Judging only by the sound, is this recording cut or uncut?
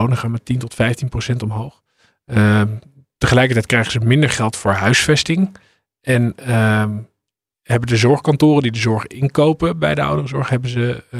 uncut